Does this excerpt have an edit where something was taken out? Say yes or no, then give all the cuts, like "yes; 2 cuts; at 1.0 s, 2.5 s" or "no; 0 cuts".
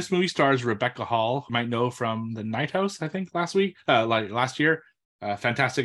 yes; 1 cut; at 1.5 s